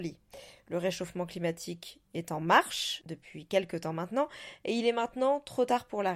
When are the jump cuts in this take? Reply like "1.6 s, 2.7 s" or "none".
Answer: none